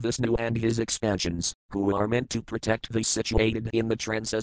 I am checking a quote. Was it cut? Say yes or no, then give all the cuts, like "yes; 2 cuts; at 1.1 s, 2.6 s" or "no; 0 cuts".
yes; 1 cut; at 3.0 s